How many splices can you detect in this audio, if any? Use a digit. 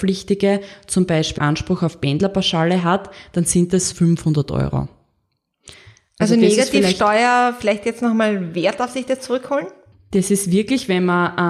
2